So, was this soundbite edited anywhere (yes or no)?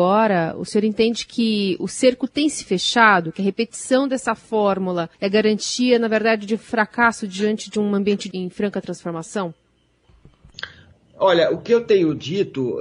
yes